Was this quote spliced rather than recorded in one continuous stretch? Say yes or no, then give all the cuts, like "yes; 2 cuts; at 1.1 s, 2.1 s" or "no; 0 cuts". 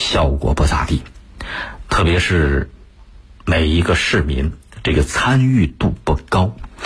no; 0 cuts